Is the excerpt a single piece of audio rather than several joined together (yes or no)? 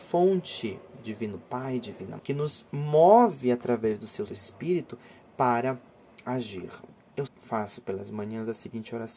no